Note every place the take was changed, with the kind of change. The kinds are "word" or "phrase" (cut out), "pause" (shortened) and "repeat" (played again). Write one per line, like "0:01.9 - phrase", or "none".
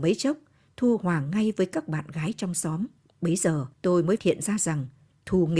0:03.0 - pause
0:03.7 - pause
0:04.2 - word